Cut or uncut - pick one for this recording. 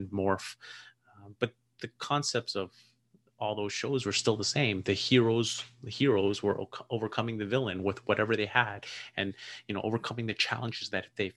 uncut